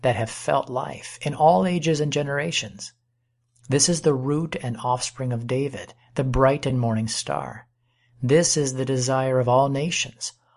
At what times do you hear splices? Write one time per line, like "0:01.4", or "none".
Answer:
none